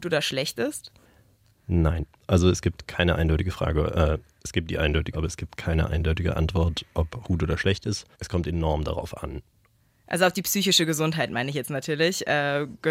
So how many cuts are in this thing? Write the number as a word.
three